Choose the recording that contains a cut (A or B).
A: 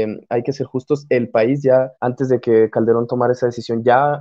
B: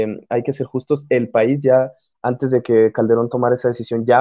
A